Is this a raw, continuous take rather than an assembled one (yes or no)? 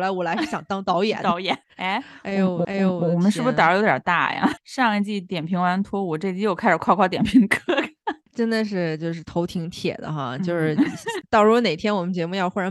no